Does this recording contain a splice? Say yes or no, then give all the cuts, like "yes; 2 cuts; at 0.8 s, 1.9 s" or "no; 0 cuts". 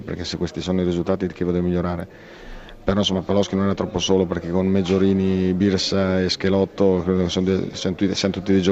no; 0 cuts